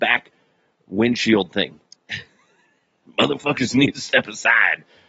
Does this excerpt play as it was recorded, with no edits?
no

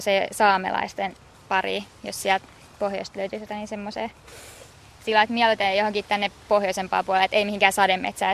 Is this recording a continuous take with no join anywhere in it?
yes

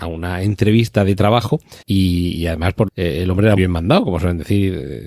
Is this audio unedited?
no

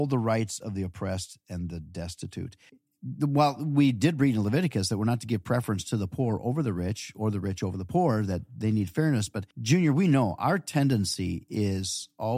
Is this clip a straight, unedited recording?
no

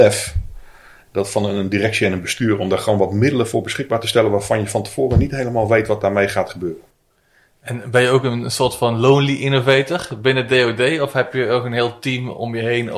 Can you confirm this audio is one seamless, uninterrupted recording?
yes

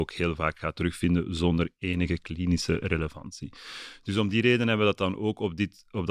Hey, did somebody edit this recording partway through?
no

